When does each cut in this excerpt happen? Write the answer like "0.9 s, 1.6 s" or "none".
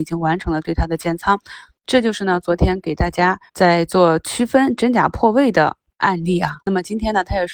3.5 s, 6.6 s